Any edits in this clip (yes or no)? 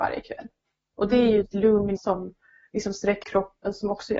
yes